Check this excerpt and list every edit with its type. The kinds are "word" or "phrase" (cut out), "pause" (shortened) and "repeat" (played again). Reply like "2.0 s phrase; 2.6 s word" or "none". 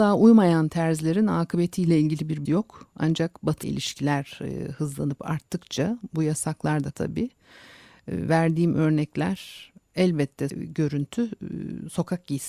2.4 s word; 3.6 s word; 6.9 s word; 10.5 s word